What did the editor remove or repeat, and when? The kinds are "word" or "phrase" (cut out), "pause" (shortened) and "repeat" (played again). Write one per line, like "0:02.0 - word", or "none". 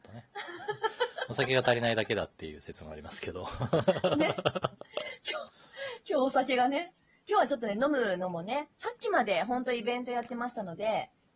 none